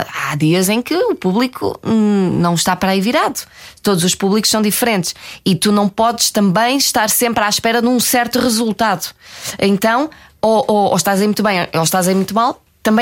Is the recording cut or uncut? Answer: uncut